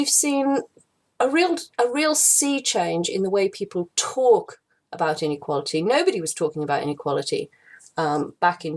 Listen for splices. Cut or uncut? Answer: cut